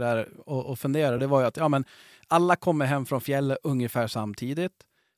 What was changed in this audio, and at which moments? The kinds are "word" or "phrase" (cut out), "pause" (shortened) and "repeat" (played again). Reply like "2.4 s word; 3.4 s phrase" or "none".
none